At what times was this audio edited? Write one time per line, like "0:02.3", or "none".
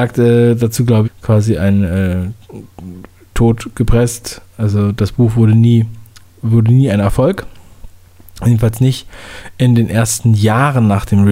0:01.0
0:03.3